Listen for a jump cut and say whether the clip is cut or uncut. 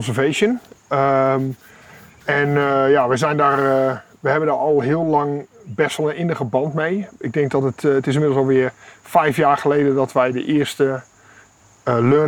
uncut